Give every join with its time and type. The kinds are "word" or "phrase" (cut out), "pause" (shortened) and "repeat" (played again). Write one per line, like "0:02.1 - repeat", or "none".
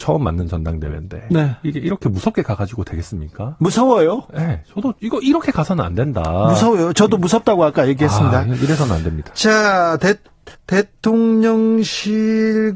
0:05.0 - pause
0:10.5 - pause